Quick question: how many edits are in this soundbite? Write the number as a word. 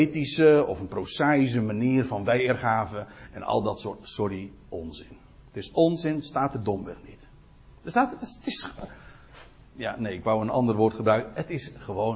zero